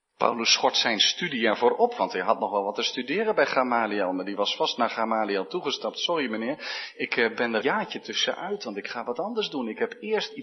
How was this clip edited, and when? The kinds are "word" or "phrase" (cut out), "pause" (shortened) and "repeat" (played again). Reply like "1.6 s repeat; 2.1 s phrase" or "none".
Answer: 7.6 s word